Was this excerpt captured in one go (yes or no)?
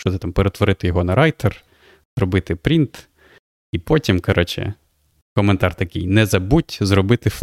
yes